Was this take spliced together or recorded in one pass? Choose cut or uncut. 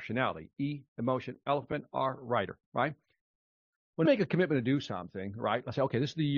cut